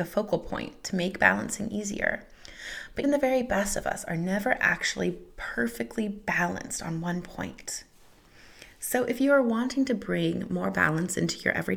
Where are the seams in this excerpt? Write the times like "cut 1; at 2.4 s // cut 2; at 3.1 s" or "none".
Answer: cut 1; at 3.0 s